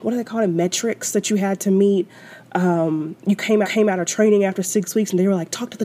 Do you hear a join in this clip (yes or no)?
yes